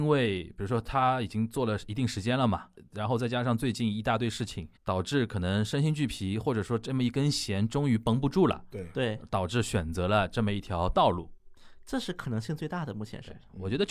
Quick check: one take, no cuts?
no; 1 cut; at 4.8 s

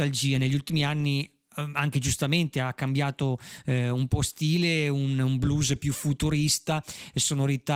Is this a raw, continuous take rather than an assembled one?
yes; 0 cuts

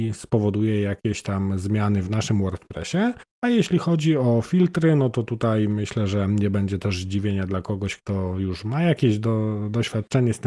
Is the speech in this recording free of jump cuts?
no; 1 cut; at 3.3 s

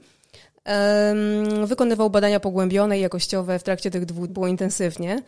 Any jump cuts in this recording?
yes; 1 cut; at 4.3 s

